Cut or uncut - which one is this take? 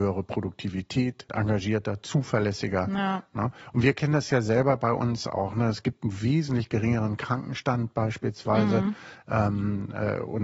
cut